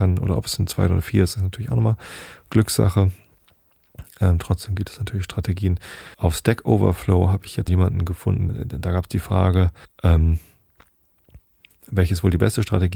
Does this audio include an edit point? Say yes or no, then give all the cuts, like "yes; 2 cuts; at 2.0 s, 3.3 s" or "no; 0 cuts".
yes; 4 cuts; at 6.1 s, 7.7 s, 8.5 s, 9.8 s